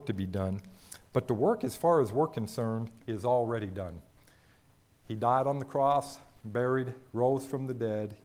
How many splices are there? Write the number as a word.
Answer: one